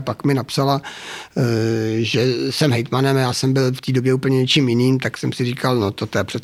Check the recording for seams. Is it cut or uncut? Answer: uncut